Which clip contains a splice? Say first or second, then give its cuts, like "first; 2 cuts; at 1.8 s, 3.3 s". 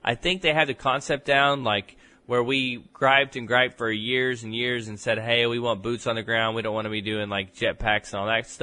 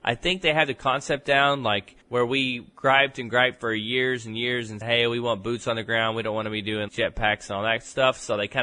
second; 3 cuts; at 2.0 s, 4.8 s, 6.9 s